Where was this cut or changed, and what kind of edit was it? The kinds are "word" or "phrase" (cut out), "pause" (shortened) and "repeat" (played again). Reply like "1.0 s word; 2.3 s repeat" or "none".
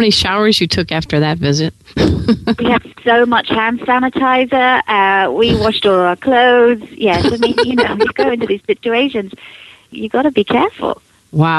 none